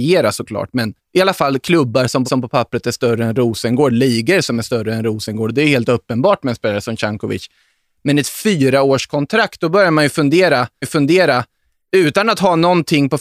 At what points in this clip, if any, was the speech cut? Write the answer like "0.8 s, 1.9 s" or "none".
1.0 s, 2.3 s, 10.8 s